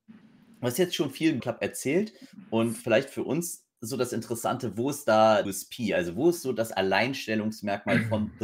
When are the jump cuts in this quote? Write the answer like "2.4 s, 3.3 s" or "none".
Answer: 1.4 s, 5.4 s